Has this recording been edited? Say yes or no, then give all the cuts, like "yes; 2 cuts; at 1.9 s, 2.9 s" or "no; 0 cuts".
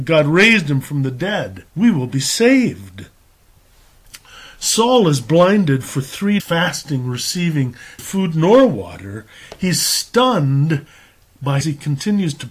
yes; 4 cuts; at 1.7 s, 6.4 s, 8.0 s, 11.6 s